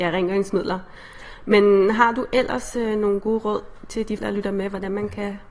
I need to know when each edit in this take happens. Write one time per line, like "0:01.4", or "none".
0:04.2